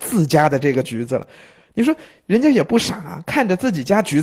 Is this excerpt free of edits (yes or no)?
yes